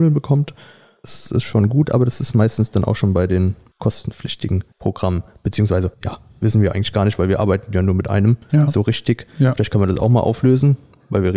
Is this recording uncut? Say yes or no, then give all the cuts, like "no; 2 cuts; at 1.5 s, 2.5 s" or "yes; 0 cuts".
no; 1 cut; at 5.9 s